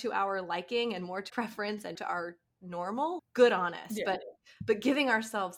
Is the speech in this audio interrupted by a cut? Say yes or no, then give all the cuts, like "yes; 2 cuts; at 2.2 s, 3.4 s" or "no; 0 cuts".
yes; 3 cuts; at 1.3 s, 1.9 s, 3.2 s